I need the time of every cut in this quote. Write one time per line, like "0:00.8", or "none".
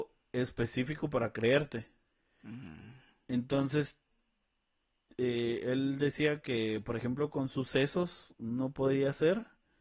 0:02.0

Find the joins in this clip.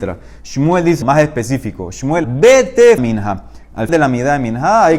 0:01.0
0:02.2
0:03.0
0:03.9

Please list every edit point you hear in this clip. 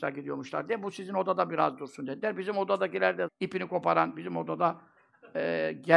0:03.3

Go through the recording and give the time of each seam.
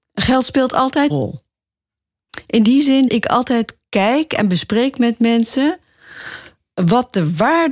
0:01.1
0:03.1

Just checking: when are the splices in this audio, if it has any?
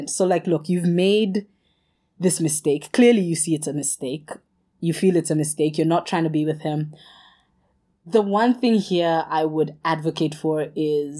none

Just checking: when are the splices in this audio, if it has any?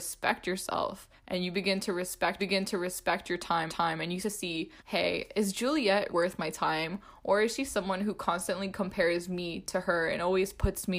0:01.2
0:02.4
0:03.7
0:04.2
0:04.8
0:06.1

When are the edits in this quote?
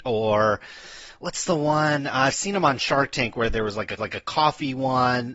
0:04.0

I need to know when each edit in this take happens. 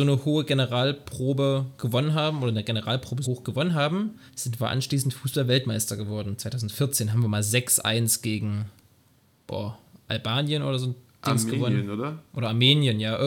0:03.2
0:04.3

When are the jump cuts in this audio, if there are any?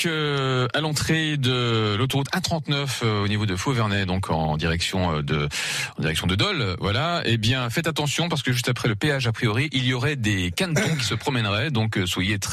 none

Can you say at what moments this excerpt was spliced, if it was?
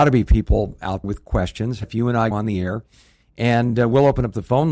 0:01.0
0:01.8
0:02.3

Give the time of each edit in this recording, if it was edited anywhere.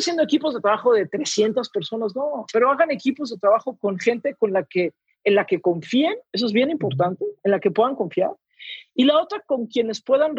0:06.3

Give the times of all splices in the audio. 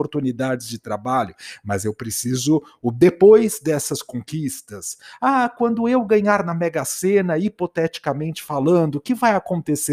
none

